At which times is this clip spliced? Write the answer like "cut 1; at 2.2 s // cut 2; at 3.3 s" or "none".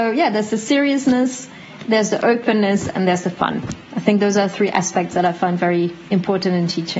none